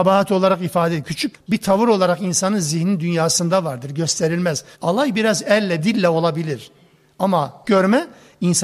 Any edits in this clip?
yes; 4 cuts; at 1.3 s, 4.7 s, 5.8 s, 7.6 s

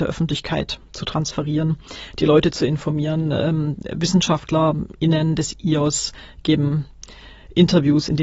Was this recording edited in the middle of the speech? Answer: no; 0 cuts

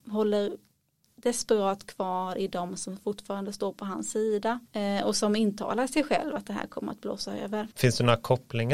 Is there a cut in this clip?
yes; 2 cuts; at 4.7 s, 7.7 s

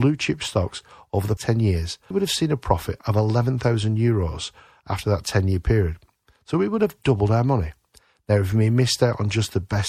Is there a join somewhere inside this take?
yes; 2 cuts; at 1.4 s, 2.1 s

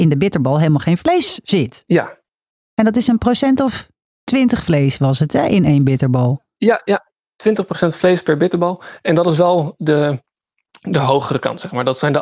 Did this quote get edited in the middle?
no; 0 cuts

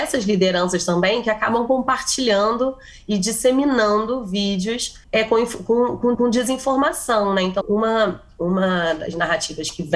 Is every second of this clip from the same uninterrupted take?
no; 3 cuts; at 5.0 s, 6.1 s, 7.6 s

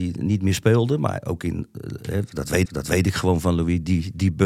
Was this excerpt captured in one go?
no; 1 cut; at 2.7 s

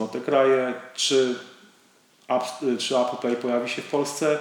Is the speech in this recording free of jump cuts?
yes; 0 cuts

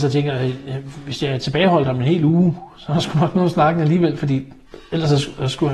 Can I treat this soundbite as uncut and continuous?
yes; 0 cuts

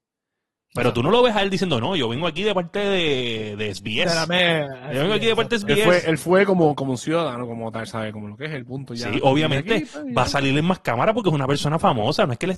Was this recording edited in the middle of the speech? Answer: no; 0 cuts

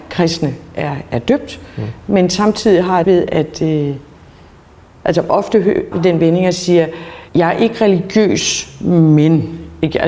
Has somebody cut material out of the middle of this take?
yes; 3 cuts; at 3.0 s, 5.9 s, 7.3 s

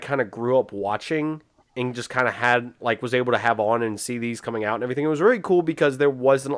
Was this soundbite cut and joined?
no; 0 cuts

